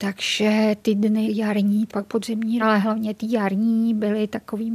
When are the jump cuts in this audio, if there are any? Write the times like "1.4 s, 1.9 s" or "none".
1.2 s, 1.9 s, 2.6 s

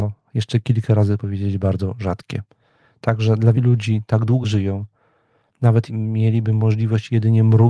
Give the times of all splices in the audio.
1.2 s, 3.5 s, 4.4 s, 5.9 s

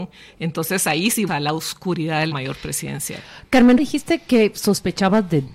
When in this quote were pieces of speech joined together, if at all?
1.3 s, 2.3 s, 3.8 s

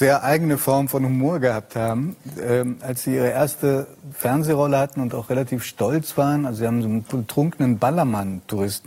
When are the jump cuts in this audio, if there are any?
none

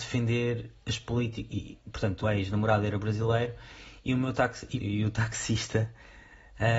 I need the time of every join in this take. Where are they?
2.2 s, 4.8 s

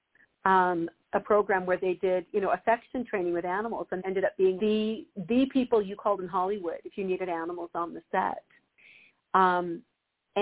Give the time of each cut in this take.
4.0 s, 4.6 s

